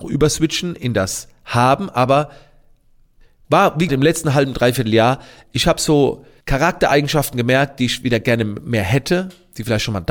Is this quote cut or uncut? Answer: cut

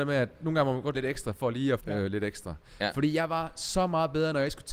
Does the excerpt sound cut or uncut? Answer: cut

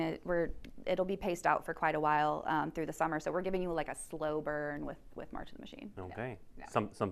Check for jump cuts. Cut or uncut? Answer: uncut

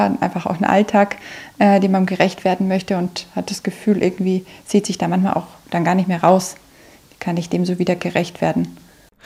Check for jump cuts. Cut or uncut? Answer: uncut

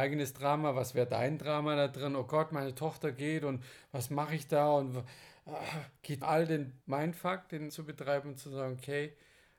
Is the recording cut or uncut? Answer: cut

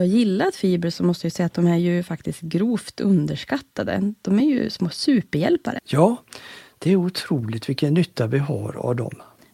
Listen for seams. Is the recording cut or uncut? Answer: uncut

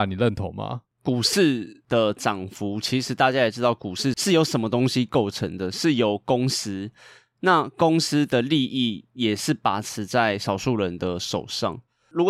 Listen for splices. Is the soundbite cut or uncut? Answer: uncut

